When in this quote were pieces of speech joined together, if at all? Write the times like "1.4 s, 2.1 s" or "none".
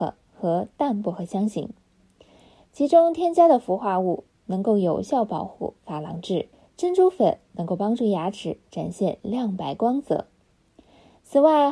6.5 s